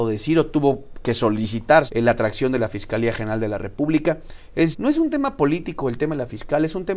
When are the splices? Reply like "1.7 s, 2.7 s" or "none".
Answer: 1.9 s, 4.7 s